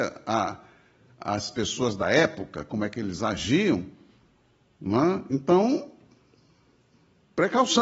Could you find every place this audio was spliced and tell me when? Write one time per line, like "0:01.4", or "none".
none